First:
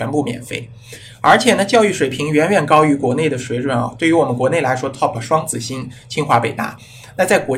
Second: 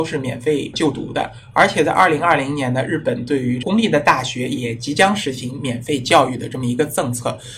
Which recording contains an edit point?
first; 1 cut; at 5.1 s

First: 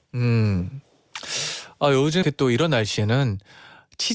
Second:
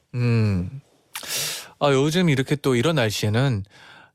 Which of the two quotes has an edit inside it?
first; 1 cut; at 2.2 s

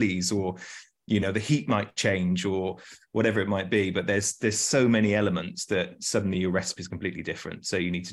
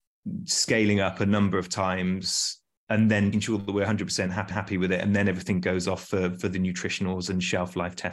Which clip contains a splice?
second; 2 cuts; at 3.3 s, 4.5 s

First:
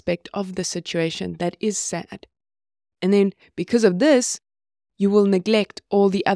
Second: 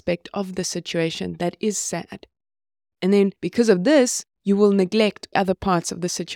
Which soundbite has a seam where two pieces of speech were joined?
second; 3 cuts; at 3.4 s, 4.3 s, 5.3 s

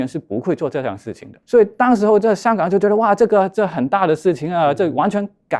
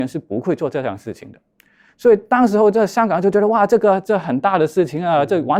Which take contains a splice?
first; 1 cut; at 1.4 s

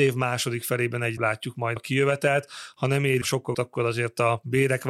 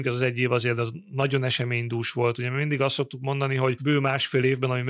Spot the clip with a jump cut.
first; 4 cuts; at 1.2 s, 1.8 s, 3.2 s, 3.5 s

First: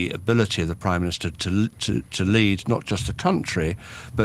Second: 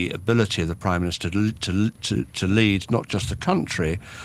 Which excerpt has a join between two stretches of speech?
first; 1 cut; at 1.3 s

